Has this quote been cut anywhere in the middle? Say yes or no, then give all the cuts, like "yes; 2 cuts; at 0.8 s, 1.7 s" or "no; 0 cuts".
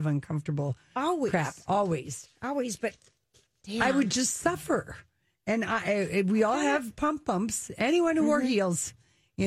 no; 0 cuts